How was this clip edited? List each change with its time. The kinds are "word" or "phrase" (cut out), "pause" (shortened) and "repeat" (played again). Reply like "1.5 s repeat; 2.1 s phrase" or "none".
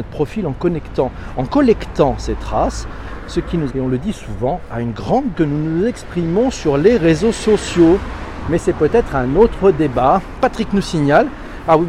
3.7 s word; 5.3 s phrase